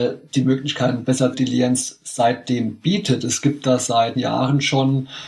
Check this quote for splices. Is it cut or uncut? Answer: cut